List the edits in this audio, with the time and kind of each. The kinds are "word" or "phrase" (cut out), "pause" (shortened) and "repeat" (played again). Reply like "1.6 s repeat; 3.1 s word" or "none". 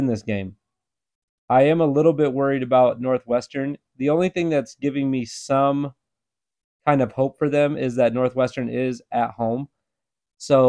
none